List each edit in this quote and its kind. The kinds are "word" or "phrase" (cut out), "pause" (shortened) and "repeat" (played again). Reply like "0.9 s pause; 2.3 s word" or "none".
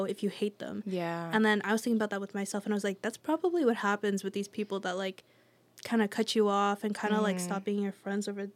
none